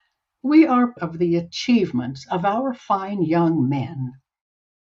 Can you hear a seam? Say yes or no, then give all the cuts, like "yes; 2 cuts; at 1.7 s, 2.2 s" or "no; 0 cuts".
yes; 1 cut; at 1.0 s